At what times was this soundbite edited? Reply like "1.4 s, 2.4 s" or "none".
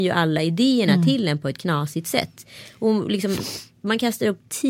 none